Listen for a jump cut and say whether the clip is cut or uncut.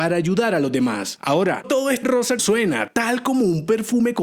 cut